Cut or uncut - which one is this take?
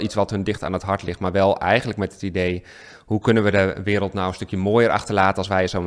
uncut